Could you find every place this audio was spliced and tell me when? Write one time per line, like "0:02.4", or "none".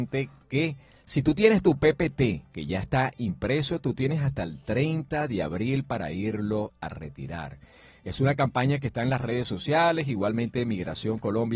none